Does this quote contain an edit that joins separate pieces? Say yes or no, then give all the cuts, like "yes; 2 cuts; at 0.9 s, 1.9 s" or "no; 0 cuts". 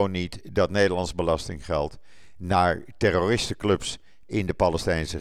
no; 0 cuts